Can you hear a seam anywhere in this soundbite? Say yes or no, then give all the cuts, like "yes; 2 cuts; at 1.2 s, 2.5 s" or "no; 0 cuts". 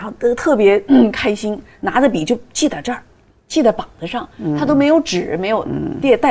no; 0 cuts